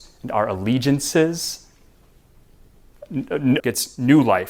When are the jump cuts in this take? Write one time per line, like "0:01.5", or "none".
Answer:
0:03.6